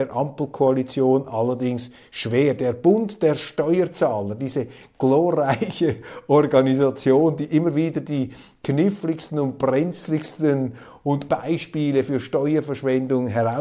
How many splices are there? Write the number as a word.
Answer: one